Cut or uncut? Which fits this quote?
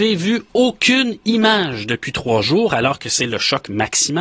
uncut